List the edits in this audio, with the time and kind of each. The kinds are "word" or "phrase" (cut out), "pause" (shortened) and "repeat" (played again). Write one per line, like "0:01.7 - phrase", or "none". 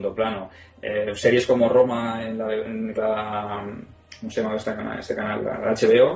0:03.0 - word